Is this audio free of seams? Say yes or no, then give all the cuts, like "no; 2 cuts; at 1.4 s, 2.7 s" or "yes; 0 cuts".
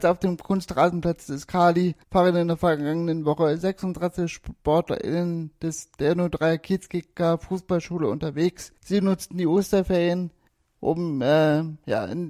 no; 3 cuts; at 2.0 s, 8.8 s, 10.5 s